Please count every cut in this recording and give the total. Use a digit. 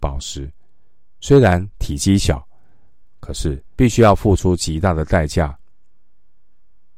2